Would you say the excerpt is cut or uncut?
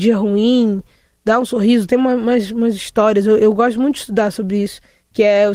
uncut